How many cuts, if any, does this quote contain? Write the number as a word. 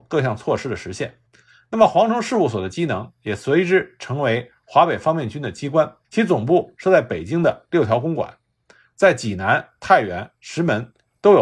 two